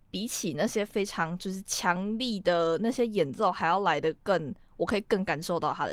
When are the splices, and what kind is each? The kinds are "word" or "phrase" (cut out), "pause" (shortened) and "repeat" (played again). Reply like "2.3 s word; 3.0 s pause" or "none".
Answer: none